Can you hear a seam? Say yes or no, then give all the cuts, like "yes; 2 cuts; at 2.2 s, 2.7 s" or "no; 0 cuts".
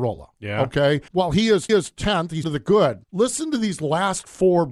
yes; 4 cuts; at 1.1 s, 1.7 s, 2.4 s, 3.0 s